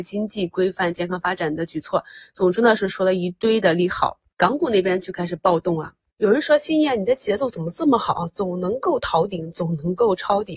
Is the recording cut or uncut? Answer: uncut